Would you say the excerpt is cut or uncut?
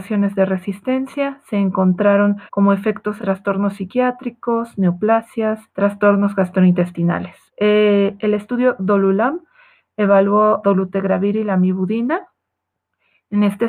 cut